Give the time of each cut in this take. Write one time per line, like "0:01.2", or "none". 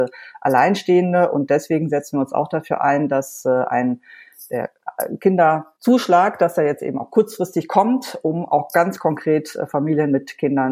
0:05.8